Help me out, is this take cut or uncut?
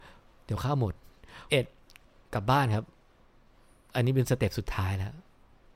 cut